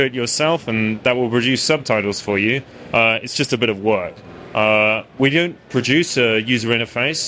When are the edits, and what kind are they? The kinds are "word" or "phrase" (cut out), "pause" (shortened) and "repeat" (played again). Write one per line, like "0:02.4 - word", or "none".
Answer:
none